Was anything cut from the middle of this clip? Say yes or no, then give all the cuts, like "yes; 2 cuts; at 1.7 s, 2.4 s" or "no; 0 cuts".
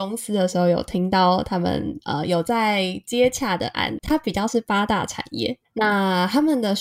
yes; 1 cut; at 4.0 s